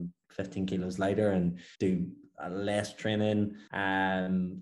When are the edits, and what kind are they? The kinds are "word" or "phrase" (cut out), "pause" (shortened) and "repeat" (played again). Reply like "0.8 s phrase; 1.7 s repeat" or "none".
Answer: 1.7 s pause; 3.7 s pause